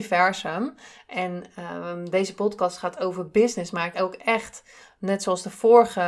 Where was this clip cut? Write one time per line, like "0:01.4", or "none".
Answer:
0:03.9